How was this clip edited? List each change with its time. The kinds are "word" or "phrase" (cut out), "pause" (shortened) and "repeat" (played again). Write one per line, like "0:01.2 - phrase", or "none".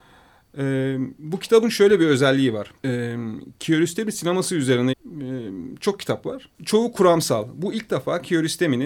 0:02.8 - pause
0:04.9 - word
0:06.5 - pause